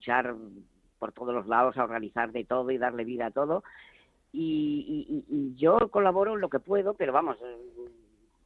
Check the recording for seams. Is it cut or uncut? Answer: uncut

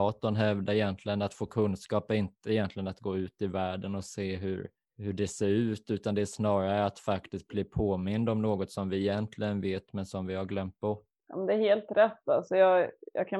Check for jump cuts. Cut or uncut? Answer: uncut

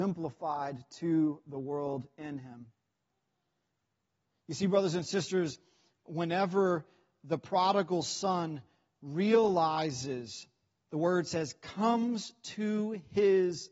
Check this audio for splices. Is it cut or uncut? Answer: uncut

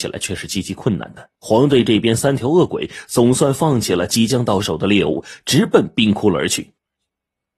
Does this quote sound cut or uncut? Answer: cut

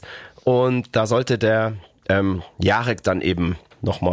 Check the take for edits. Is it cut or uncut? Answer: uncut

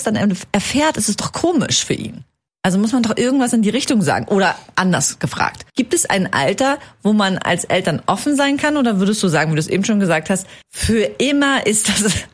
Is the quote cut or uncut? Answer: cut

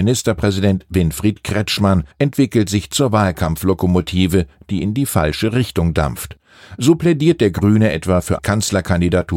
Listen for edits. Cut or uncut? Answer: cut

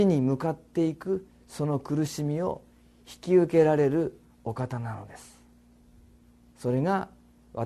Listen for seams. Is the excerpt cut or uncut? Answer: uncut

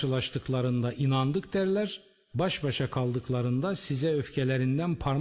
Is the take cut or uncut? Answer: uncut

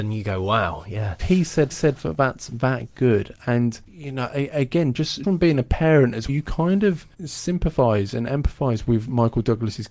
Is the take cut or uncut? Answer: cut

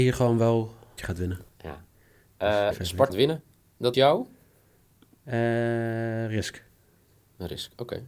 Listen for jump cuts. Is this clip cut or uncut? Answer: cut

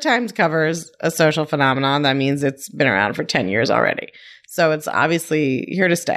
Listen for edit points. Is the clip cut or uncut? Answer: uncut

